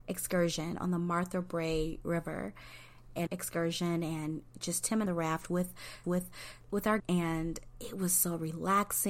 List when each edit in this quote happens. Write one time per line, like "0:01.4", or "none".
0:03.3
0:04.5
0:05.1
0:06.0
0:07.0

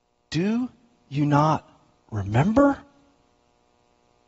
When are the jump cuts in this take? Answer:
none

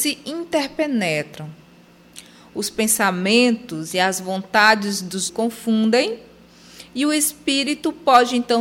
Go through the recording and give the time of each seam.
0:05.3

